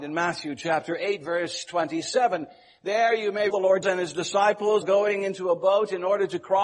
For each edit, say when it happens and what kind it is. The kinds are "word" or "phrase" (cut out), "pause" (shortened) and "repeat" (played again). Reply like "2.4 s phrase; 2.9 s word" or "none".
3.5 s word; 3.8 s word; 4.8 s word

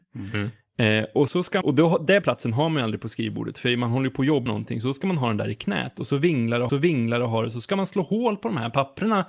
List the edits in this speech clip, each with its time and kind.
1.3 s word; 1.6 s word; 2.2 s word; 4.5 s word; 6.7 s repeat

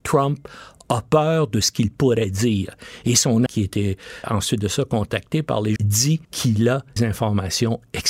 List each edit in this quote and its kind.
3.5 s word; 4.2 s word; 5.8 s word; 6.2 s pause; 7.0 s word

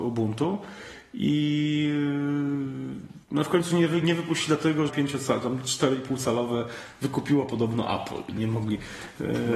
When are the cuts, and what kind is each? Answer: 3.2 s pause; 4.9 s phrase; 8.4 s word

